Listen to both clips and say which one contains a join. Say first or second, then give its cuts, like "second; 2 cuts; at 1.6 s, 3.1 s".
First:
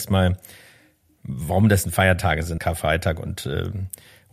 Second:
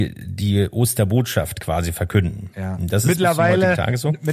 first; 2 cuts; at 1.8 s, 2.6 s